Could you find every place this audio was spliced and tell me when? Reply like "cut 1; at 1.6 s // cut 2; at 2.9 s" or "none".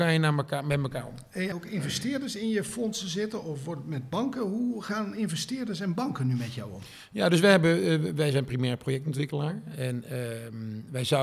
cut 1; at 1.5 s